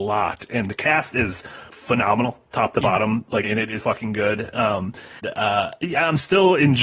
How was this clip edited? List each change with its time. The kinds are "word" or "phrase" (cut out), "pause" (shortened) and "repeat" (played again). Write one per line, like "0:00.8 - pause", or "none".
0:01.7 - word
0:03.4 - word
0:03.8 - word
0:05.2 - word

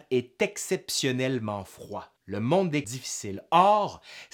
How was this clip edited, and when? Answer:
0:02.2 - pause
0:02.8 - phrase

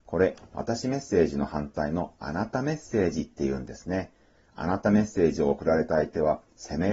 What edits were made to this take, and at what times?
none

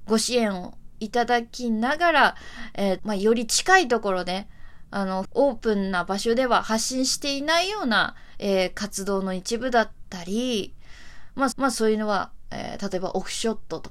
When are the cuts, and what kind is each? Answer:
0:03.0 - word
0:05.2 - phrase
0:11.5 - repeat

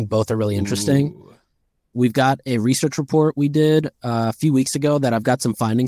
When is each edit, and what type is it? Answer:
none

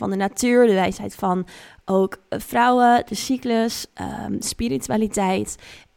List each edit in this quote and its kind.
none

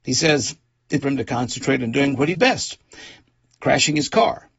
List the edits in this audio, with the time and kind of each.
0:01.0 - word
0:02.3 - word

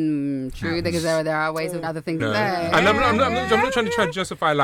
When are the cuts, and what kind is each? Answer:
0:01.8 - word
0:02.2 - word

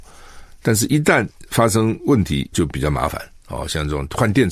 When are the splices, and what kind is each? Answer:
0:02.5 - word

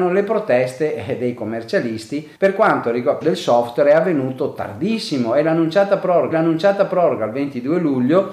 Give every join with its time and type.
0:02.3 - pause
0:03.2 - phrase
0:06.3 - repeat

